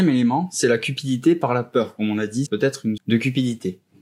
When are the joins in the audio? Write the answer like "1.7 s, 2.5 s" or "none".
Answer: 2.5 s, 3.0 s